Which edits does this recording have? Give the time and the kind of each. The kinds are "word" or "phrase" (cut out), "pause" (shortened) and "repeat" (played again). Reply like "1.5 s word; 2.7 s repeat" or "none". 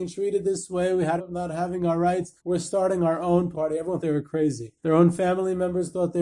1.2 s word; 2.4 s pause; 3.5 s word; 4.0 s word; 4.8 s pause